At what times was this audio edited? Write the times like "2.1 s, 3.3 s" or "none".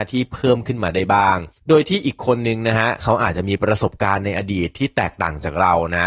1.6 s

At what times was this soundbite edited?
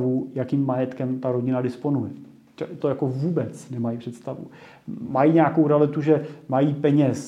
2.8 s

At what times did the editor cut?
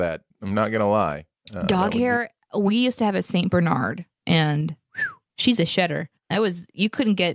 none

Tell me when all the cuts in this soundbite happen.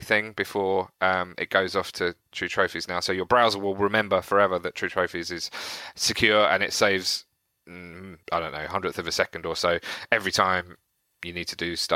8.2 s, 11.0 s

